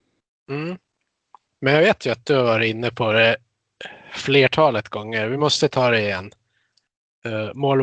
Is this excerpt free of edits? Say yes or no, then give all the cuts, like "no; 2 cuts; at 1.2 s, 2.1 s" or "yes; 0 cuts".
yes; 0 cuts